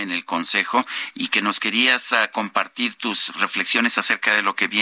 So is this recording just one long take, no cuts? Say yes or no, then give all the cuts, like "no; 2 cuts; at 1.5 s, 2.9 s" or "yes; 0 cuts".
yes; 0 cuts